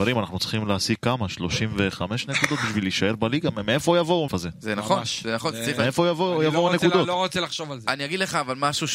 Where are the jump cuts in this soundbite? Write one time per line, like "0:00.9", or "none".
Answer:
0:04.3